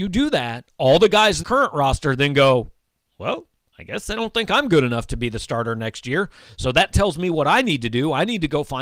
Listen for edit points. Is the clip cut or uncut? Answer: cut